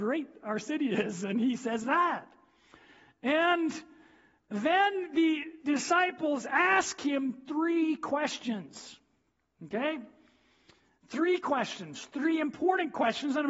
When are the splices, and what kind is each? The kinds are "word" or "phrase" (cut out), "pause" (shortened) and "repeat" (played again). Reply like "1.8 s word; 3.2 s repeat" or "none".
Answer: none